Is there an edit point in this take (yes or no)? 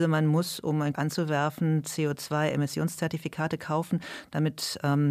yes